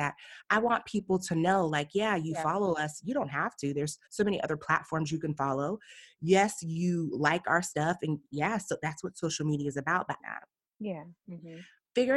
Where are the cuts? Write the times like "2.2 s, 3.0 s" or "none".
4.0 s, 10.2 s